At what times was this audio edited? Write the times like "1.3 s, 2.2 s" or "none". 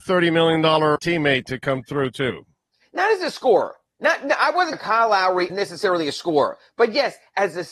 1.0 s, 4.7 s, 5.5 s